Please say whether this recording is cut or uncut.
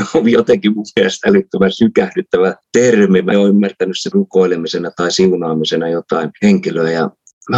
cut